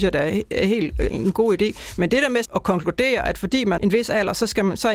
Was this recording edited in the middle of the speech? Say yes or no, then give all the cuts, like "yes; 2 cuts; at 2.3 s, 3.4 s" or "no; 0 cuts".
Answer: yes; 3 cuts; at 1.1 s, 2.4 s, 3.8 s